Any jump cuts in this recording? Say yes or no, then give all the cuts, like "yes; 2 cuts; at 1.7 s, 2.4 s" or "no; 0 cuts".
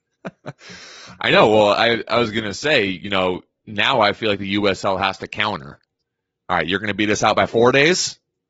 no; 0 cuts